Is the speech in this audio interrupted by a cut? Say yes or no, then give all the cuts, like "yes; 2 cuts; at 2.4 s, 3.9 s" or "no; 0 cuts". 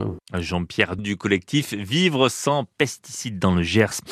yes; 1 cut; at 1.0 s